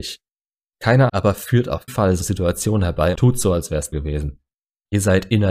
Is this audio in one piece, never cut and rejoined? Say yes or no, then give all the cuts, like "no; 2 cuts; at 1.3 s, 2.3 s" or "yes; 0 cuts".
no; 5 cuts; at 1.1 s, 1.9 s, 2.2 s, 3.1 s, 3.9 s